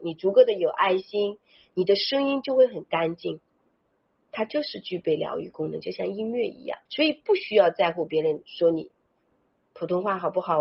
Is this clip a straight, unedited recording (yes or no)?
no